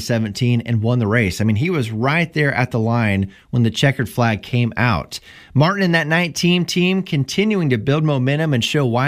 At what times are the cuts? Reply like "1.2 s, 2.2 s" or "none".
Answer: none

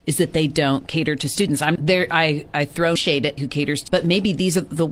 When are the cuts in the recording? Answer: 1.8 s, 3.0 s, 3.4 s, 3.9 s

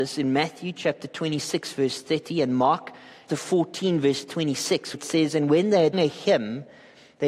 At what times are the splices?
3.3 s, 4.9 s, 5.9 s

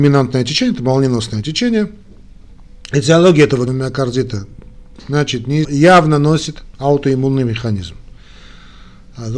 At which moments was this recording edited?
3.7 s, 5.6 s, 6.7 s

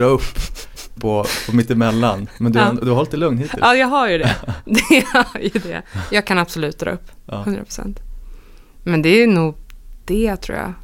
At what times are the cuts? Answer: 1.0 s, 5.3 s

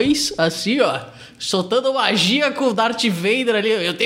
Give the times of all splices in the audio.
none

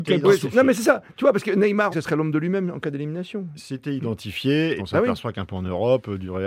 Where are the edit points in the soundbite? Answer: 1.9 s, 4.8 s, 5.5 s

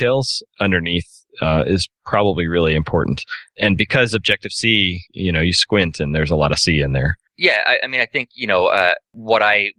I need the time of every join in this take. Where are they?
5.1 s, 7.3 s

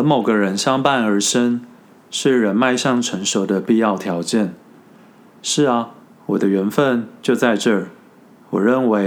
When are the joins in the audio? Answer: 6.0 s

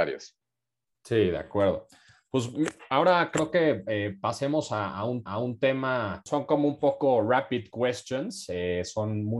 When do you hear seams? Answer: 5.3 s

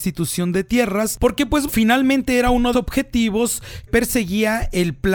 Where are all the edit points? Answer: 1.7 s, 2.7 s, 3.9 s

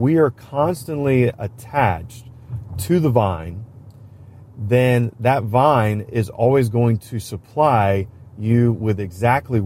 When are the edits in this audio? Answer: none

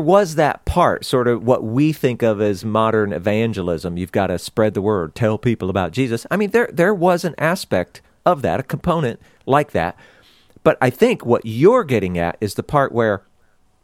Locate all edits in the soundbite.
none

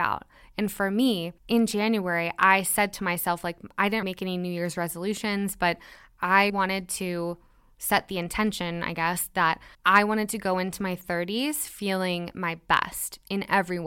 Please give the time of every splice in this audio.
1.4 s, 4.0 s, 6.5 s, 9.7 s

